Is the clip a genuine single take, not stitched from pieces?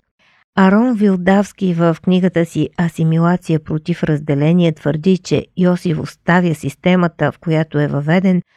yes; 0 cuts

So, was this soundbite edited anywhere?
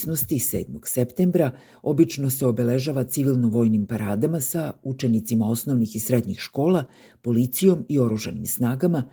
no; 0 cuts

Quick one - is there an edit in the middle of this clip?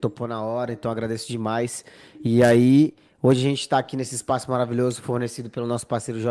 no; 0 cuts

